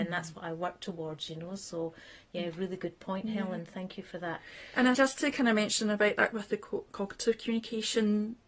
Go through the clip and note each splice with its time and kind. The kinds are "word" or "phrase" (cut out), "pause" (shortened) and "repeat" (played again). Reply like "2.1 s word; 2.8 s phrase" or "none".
4.9 s word; 6.3 s word